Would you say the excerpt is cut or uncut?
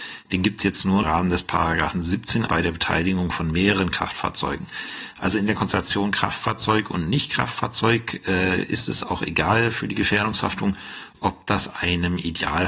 cut